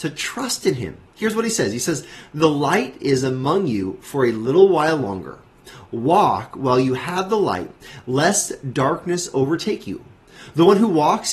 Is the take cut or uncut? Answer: uncut